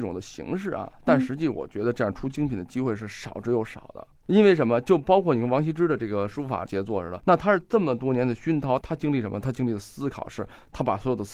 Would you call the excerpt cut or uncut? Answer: uncut